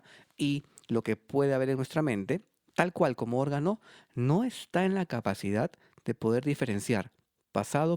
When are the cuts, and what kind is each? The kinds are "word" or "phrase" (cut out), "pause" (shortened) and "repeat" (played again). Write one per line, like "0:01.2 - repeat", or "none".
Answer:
none